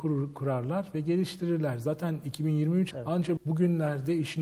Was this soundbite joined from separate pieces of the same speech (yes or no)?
yes